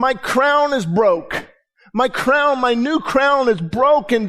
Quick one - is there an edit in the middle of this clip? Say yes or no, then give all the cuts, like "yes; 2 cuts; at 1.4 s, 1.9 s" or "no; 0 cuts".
no; 0 cuts